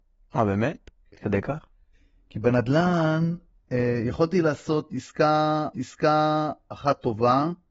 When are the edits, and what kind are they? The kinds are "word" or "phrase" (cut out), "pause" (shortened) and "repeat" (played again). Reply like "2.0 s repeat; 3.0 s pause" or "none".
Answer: 5.7 s repeat